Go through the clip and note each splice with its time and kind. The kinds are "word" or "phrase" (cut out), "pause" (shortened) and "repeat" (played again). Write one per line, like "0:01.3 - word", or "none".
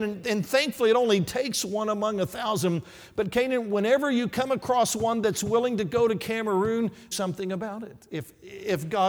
0:07.1 - phrase